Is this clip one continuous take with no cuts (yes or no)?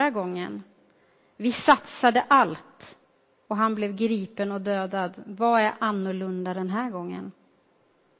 yes